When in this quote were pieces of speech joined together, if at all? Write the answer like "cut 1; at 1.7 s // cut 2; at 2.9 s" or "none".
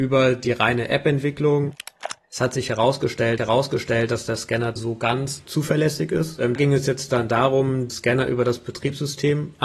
cut 1; at 3.4 s // cut 2; at 4.8 s // cut 3; at 6.6 s // cut 4; at 7.9 s